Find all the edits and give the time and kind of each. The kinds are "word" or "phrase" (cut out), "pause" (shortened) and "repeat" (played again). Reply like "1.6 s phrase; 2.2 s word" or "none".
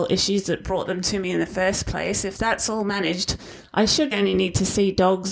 4.1 s word

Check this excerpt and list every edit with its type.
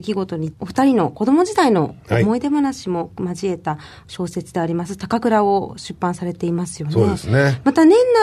none

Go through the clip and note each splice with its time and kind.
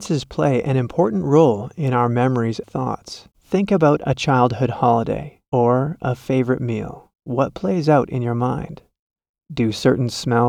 2.6 s word; 3.3 s pause; 5.5 s pause; 7.1 s pause

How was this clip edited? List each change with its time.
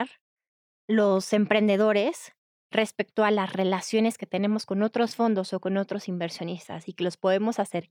none

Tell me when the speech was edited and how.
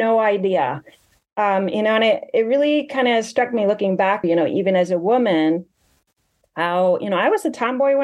4.2 s phrase

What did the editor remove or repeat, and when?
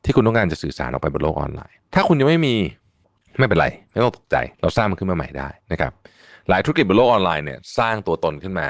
1.8 s pause; 3.0 s pause; 4.5 s pause; 5.6 s pause

